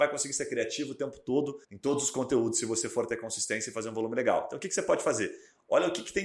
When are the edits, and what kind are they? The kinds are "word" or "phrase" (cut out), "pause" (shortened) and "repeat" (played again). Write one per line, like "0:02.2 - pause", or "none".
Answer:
0:01.6 - pause